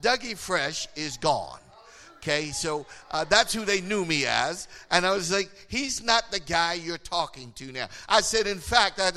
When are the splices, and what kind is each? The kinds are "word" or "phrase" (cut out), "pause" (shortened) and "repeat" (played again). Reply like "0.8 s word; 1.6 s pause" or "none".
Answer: none